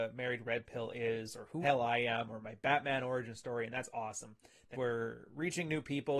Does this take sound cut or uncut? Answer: cut